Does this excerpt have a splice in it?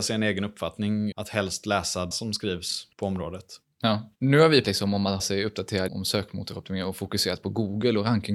yes; 7 cuts; at 1.1 s, 2.1 s, 2.9 s, 4.2 s, 4.6 s, 5.2 s, 5.9 s

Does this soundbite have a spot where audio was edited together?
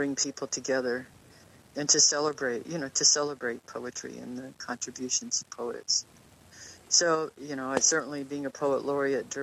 no; 0 cuts

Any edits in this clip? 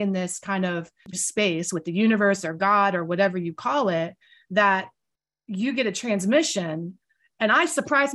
yes; 1 cut; at 1.1 s

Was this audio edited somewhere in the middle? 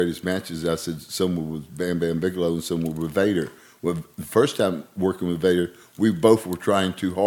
no; 0 cuts

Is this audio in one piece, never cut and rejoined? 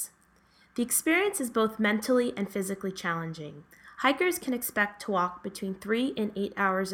yes; 0 cuts

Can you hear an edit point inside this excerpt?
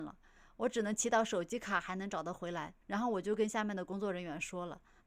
yes; 1 cut; at 2.8 s

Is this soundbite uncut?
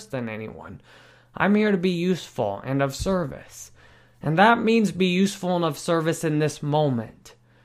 yes; 0 cuts

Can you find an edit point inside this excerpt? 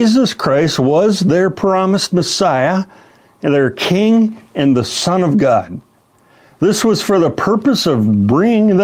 no; 0 cuts

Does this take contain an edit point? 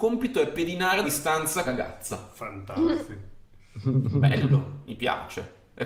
yes; 2 cuts; at 1.0 s, 1.6 s

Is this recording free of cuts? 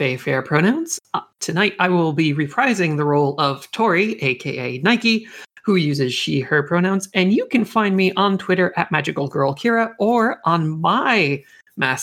yes; 0 cuts

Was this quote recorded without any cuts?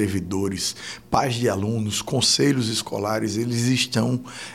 yes; 0 cuts

